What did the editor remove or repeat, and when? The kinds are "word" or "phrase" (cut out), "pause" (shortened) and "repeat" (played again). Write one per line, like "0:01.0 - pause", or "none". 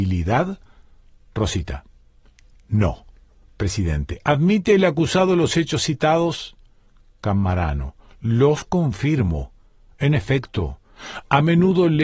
none